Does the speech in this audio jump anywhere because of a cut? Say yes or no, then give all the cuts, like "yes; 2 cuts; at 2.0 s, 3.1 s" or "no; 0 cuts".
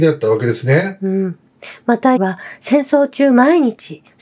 yes; 1 cut; at 2.2 s